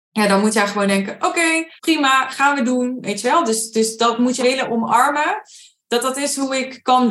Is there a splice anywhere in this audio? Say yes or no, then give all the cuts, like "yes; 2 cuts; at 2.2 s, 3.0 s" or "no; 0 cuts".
yes; 2 cuts; at 1.8 s, 4.4 s